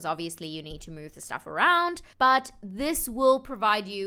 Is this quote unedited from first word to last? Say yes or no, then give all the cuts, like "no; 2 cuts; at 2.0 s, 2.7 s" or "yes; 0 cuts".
yes; 0 cuts